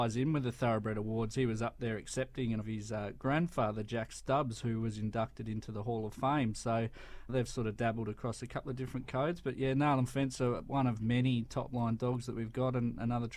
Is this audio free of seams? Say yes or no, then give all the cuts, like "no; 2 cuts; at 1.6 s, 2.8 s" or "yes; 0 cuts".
no; 2 cuts; at 2.6 s, 7.3 s